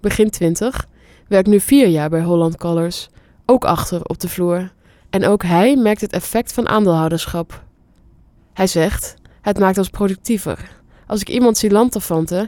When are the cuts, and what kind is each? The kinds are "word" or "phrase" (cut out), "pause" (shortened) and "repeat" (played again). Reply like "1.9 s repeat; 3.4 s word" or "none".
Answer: none